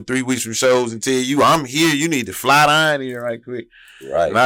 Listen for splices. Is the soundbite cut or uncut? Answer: uncut